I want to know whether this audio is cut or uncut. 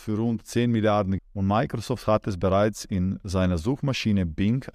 cut